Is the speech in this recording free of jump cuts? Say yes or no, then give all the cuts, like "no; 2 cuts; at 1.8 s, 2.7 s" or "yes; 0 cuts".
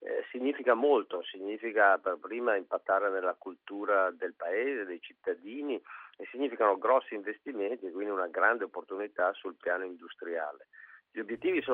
yes; 0 cuts